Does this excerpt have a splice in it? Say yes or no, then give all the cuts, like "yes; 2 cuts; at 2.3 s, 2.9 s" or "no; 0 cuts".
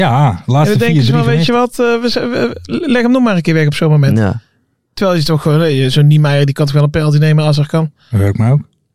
no; 0 cuts